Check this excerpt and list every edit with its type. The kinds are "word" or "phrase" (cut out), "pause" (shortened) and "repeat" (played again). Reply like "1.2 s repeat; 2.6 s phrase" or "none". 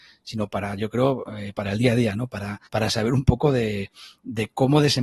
2.7 s pause